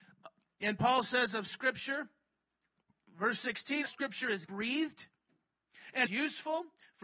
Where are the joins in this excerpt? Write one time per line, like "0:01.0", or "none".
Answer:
0:02.9
0:03.9
0:04.5
0:06.1